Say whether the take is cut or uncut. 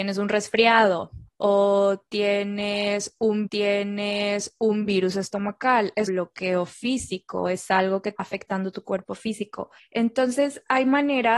cut